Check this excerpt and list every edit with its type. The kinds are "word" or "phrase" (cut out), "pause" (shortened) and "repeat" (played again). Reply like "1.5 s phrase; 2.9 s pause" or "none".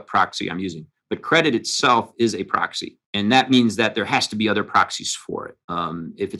none

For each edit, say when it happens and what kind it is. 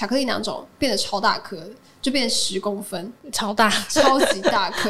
none

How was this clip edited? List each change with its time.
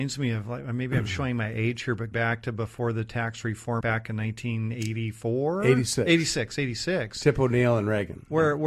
2.1 s word; 3.8 s word

